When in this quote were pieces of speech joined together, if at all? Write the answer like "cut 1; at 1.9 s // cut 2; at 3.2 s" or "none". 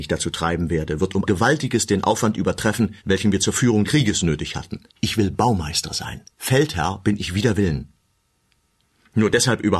cut 1; at 1.3 s // cut 2; at 3.0 s // cut 3; at 3.8 s // cut 4; at 4.9 s // cut 5; at 6.3 s